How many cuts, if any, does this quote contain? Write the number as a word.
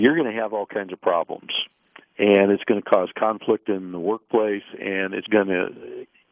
one